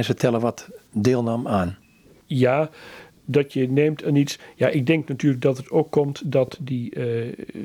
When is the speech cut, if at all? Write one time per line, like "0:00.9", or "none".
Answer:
none